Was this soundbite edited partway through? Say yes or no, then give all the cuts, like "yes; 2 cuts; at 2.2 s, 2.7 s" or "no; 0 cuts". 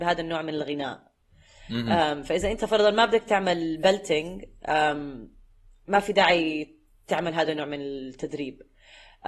no; 0 cuts